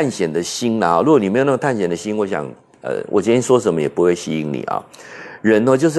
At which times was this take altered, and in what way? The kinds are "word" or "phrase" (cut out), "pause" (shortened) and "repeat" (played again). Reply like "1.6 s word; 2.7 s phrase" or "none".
none